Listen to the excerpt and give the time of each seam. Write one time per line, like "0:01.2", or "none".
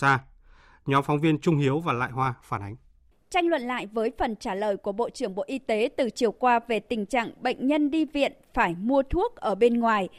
0:03.1